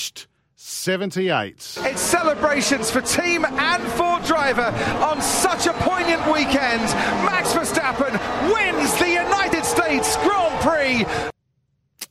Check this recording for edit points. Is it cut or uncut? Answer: uncut